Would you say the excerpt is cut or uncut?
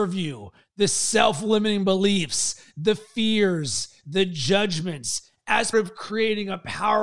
cut